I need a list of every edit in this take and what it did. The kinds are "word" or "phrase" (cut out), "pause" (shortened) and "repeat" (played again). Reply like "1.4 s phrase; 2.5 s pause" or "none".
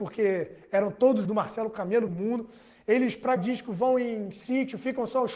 1.2 s word; 2.1 s phrase; 3.4 s word

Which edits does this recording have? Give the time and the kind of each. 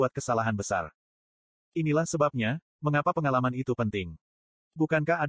none

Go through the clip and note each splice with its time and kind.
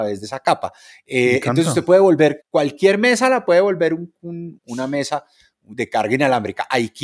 2.4 s word; 4.6 s word

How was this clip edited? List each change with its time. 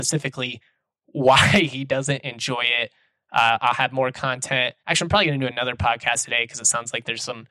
4.8 s pause

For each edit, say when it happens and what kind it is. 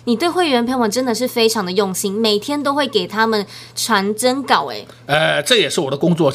none

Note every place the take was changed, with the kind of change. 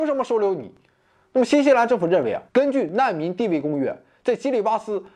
2.5 s pause

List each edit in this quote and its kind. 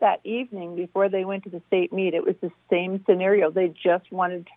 none

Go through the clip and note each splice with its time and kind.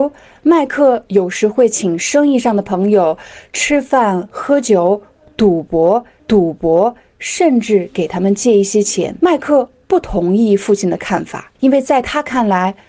6.2 s repeat; 9.2 s pause; 11.6 s pause

